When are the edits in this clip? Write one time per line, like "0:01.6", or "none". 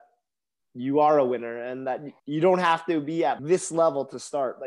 0:02.2
0:03.4